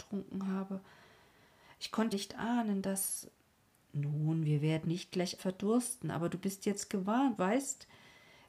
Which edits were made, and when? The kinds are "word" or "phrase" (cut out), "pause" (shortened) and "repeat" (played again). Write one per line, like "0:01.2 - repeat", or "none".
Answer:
0:02.1 - word
0:04.8 - word
0:05.4 - word
0:07.4 - word